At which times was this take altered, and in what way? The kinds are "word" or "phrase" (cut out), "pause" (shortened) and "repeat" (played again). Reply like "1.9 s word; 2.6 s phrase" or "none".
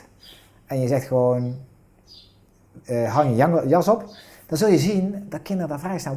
none